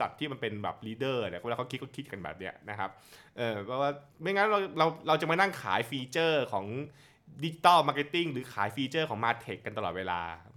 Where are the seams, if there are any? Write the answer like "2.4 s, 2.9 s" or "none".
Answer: 4.1 s